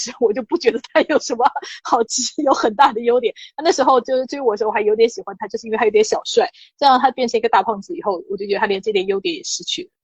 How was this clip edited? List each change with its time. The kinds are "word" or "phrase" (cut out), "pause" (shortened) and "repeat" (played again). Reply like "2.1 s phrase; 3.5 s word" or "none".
none